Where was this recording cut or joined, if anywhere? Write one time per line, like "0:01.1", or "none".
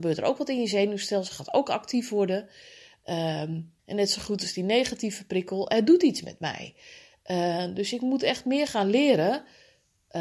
0:03.8